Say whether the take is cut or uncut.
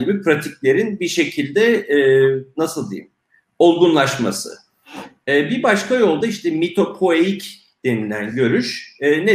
uncut